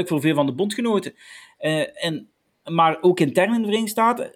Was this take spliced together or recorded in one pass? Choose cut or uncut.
uncut